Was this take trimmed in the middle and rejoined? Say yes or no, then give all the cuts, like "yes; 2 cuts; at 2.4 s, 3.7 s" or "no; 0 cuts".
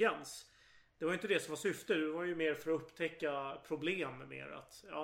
no; 0 cuts